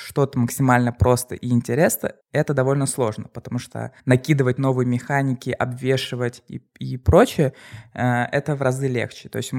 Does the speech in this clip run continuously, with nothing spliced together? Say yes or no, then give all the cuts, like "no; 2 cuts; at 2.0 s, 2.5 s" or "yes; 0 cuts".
no; 2 cuts; at 2.2 s, 4.0 s